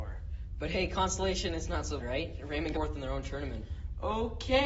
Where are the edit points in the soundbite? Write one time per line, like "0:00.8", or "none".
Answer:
0:02.0
0:02.7